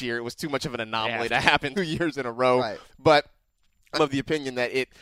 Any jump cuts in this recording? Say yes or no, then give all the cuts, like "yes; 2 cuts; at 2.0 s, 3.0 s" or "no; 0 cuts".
yes; 2 cuts; at 1.7 s, 3.9 s